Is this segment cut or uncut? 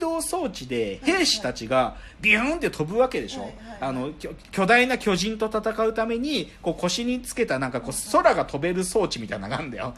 cut